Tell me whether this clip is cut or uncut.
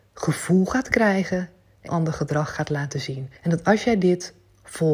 cut